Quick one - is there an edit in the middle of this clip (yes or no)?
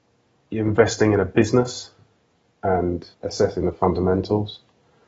yes